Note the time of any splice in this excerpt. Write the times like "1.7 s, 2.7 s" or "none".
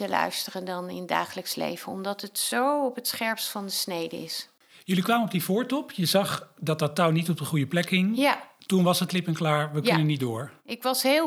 9.1 s